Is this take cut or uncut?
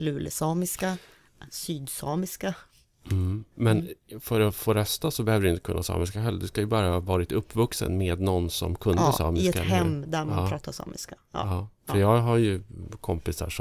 uncut